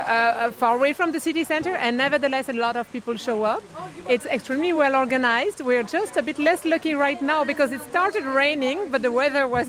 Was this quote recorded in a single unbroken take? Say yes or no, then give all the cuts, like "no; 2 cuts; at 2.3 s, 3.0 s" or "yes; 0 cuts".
yes; 0 cuts